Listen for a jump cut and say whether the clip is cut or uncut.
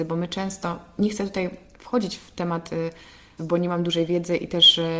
cut